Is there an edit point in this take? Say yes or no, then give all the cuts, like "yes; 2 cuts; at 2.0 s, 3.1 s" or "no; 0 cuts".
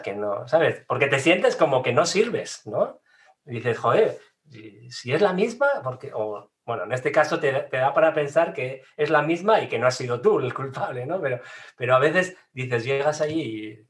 no; 0 cuts